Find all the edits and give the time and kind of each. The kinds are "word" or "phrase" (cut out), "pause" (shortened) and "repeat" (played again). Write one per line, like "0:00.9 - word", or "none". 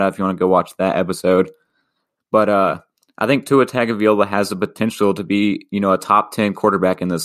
none